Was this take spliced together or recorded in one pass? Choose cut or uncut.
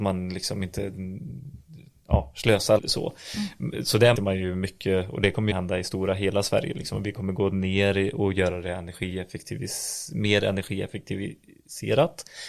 cut